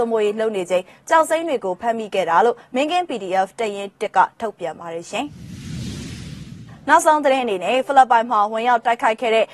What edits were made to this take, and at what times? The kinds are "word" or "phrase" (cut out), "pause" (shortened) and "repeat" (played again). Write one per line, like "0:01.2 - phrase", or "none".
none